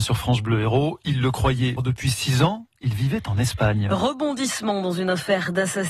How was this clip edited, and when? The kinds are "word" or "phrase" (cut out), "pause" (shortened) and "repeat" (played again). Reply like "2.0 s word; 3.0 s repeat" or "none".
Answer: 1.8 s word